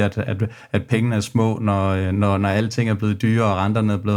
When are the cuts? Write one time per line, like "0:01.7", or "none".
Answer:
none